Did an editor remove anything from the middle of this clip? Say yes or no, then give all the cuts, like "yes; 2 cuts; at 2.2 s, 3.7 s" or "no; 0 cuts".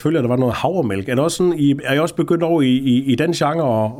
no; 0 cuts